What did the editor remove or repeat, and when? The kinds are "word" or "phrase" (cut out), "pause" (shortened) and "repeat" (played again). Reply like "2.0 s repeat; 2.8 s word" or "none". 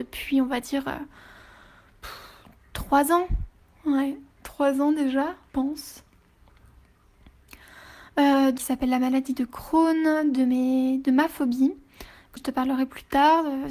4.3 s pause; 5.5 s word; 8.6 s phrase; 12.4 s word